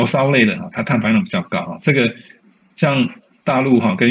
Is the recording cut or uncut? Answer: uncut